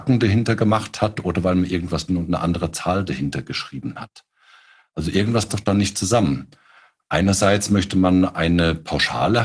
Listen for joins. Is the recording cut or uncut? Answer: cut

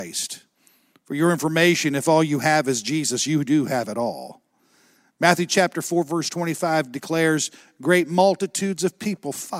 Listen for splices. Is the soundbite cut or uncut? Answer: uncut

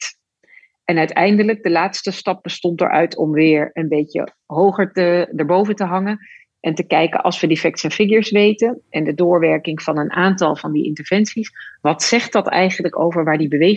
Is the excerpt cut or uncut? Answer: uncut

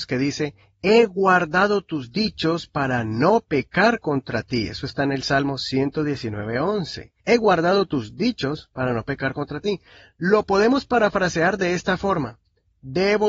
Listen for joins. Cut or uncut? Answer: cut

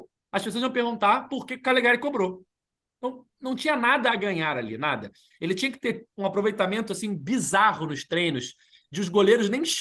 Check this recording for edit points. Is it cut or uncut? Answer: uncut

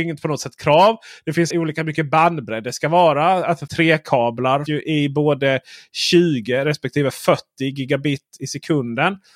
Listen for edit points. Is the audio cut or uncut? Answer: cut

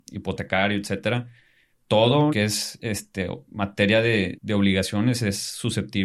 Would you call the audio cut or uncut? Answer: cut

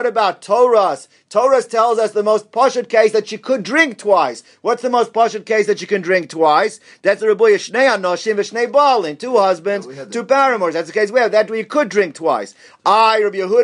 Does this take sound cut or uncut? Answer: uncut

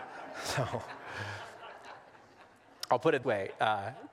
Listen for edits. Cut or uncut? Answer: cut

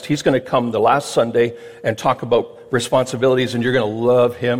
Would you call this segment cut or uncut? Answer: uncut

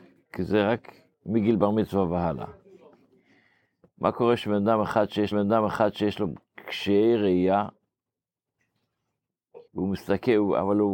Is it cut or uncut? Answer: cut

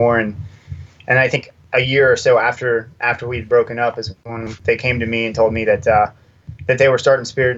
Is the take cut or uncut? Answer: uncut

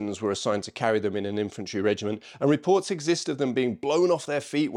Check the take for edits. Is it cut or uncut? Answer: uncut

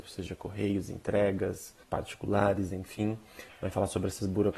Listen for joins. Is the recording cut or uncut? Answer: cut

